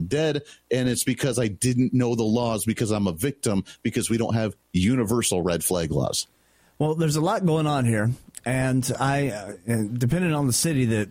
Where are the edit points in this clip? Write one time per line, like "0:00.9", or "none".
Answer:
none